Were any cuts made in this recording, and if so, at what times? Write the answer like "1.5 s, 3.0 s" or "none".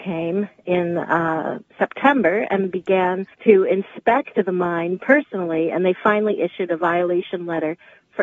1.7 s, 3.3 s